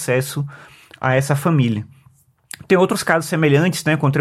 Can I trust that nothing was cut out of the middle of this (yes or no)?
yes